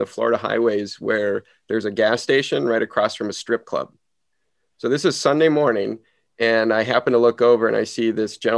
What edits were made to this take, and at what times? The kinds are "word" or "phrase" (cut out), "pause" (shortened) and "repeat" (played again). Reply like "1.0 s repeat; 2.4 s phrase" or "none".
none